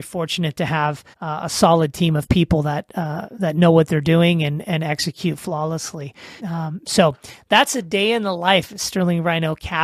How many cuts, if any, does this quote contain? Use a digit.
2